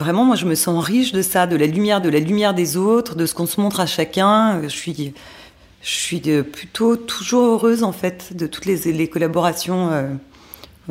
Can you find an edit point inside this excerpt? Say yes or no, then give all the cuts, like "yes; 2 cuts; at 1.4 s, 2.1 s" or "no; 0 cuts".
yes; 1 cut; at 2.0 s